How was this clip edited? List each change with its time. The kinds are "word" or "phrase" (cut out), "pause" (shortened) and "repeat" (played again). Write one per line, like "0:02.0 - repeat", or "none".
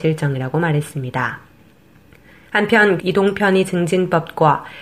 0:03.0 - word